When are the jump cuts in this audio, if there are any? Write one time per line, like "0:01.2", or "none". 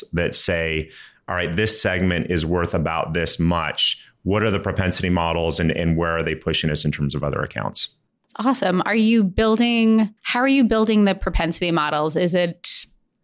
0:10.2